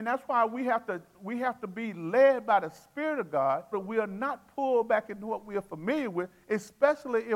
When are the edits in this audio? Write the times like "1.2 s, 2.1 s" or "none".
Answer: 3.7 s